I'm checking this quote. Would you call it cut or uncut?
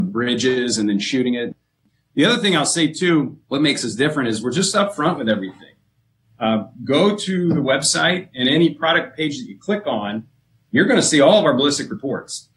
uncut